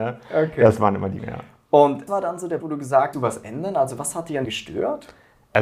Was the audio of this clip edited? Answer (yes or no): yes